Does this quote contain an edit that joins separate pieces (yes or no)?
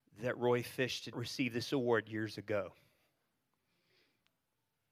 yes